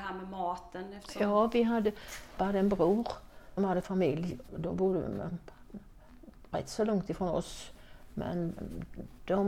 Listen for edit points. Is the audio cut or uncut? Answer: cut